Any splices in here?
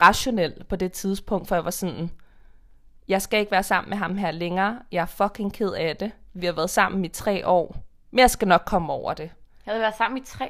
no; 0 cuts

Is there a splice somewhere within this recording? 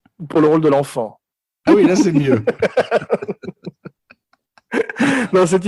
yes; 1 cut; at 1.7 s

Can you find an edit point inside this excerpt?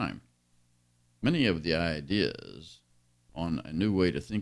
no; 0 cuts

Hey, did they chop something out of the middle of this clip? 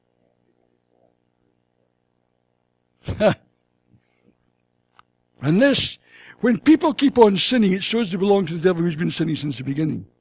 no; 0 cuts

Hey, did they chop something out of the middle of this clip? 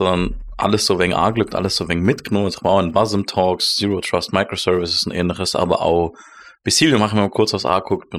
no; 0 cuts

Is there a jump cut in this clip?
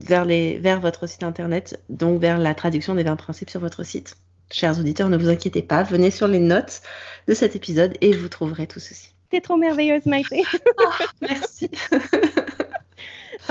no; 0 cuts

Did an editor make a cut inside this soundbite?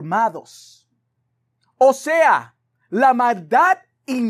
no; 0 cuts

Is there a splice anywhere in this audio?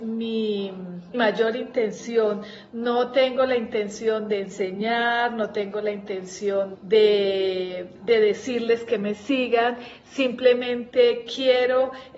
yes; 3 cuts; at 1.1 s, 6.7 s, 8.0 s

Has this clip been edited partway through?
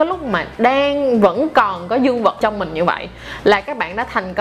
yes; 1 cut; at 2.4 s

